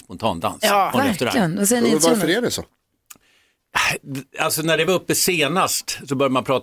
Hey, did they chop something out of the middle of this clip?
no; 0 cuts

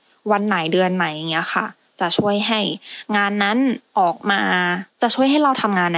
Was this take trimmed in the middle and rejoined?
yes; 2 cuts; at 3.9 s, 4.9 s

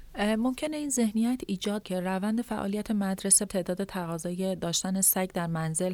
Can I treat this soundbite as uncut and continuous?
no; 2 cuts; at 1.8 s, 3.5 s

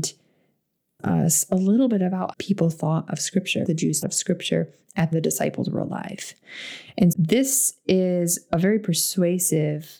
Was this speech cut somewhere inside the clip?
yes; 6 cuts; at 1.0 s, 2.3 s, 3.6 s, 4.0 s, 5.1 s, 7.1 s

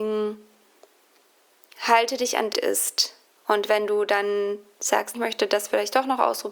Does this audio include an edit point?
yes; 3 cuts; at 2.5 s, 3.2 s, 5.1 s

